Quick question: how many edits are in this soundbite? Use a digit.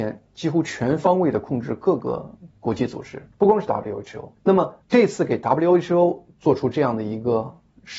4